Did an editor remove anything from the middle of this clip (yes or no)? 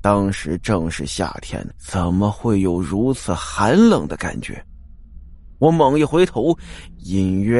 yes